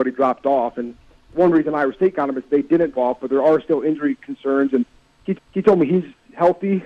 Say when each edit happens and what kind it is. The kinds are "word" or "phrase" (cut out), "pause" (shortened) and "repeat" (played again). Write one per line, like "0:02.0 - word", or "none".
0:02.9 - word
0:05.3 - repeat